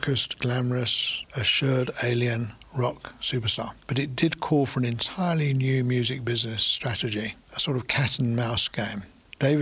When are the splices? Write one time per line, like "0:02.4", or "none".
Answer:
0:03.8
0:07.4

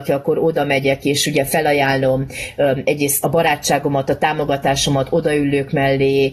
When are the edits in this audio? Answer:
0:03.2

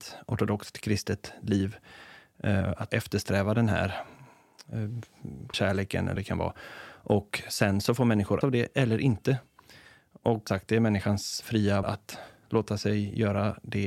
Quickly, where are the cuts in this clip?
0:02.9
0:05.5
0:06.2
0:08.4
0:10.5
0:11.8

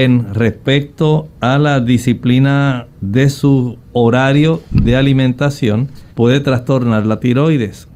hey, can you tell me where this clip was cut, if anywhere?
0:02.9
0:03.8
0:06.1

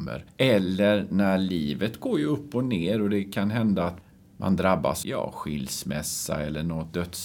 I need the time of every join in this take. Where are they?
0:05.0

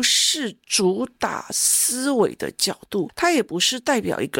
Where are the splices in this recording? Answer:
none

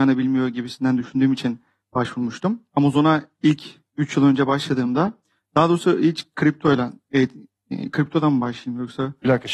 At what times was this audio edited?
none

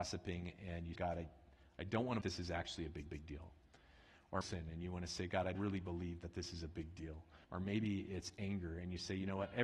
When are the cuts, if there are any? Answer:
0:00.9
0:02.2
0:03.1
0:04.4
0:05.5
0:07.4

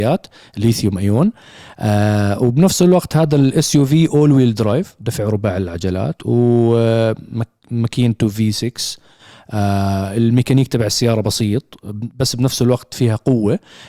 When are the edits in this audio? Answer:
none

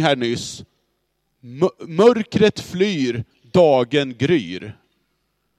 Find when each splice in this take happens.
none

